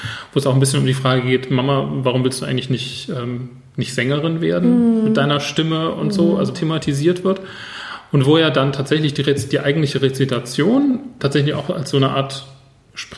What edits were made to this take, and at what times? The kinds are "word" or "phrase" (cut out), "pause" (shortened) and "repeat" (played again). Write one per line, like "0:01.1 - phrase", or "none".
0:06.5 - phrase
0:11.2 - word